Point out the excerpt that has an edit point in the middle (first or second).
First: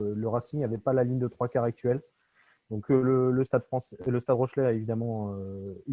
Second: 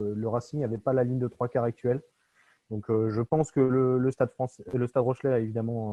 first